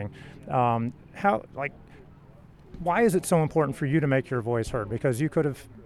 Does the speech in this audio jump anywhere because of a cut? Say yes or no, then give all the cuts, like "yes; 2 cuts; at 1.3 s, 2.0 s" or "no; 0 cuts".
no; 0 cuts